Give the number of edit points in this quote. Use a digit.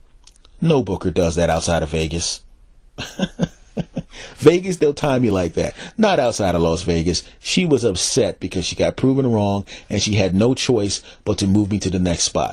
0